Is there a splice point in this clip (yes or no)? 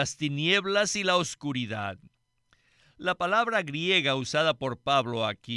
no